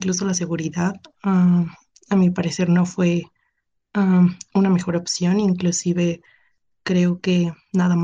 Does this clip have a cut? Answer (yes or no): no